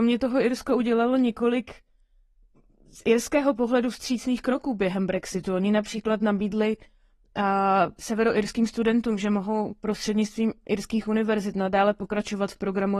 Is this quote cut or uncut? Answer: uncut